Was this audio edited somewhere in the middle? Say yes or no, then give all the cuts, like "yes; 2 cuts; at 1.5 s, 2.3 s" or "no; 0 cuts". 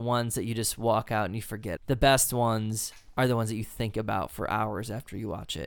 yes; 1 cut; at 1.8 s